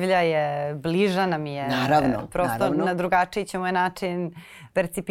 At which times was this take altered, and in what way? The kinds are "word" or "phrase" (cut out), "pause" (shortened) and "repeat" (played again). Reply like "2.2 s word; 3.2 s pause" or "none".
none